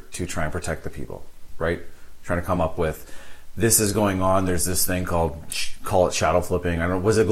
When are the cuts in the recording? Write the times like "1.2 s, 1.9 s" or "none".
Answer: none